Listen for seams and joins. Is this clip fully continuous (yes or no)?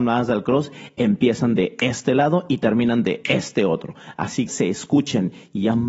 no